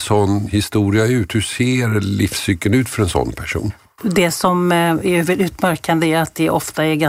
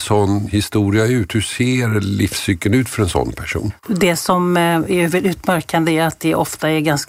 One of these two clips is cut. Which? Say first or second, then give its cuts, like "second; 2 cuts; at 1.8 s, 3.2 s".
second; 1 cut; at 3.8 s